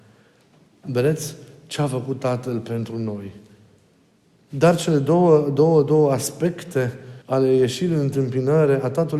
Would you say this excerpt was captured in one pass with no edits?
no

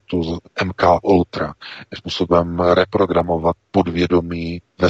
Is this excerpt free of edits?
no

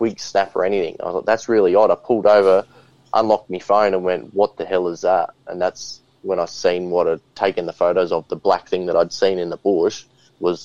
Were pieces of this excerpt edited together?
no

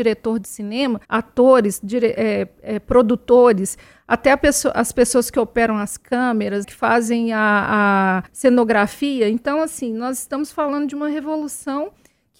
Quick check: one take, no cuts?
no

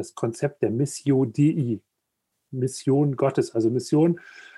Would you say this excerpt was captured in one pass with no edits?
yes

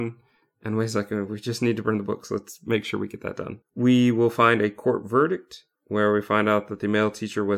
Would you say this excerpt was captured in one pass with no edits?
no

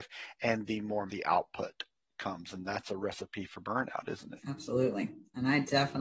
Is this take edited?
yes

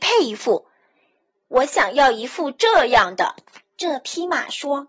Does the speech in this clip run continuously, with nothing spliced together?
yes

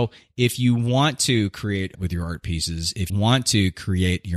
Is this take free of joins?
no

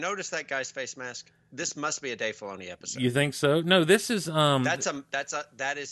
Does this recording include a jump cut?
no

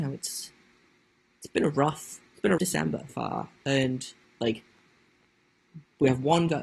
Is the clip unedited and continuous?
no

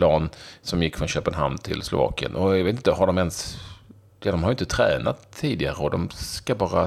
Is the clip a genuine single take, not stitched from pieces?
yes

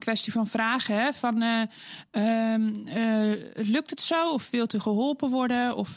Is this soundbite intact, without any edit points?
no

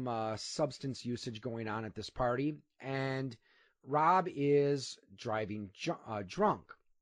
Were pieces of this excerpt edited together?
no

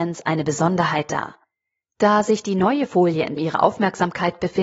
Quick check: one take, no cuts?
no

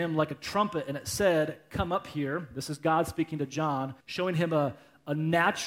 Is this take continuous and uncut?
no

